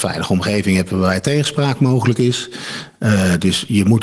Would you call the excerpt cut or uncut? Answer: uncut